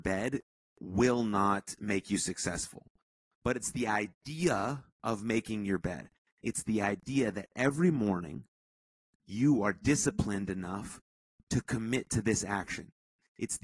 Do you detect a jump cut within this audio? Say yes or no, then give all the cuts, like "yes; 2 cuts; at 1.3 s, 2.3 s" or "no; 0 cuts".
yes; 1 cut; at 4.9 s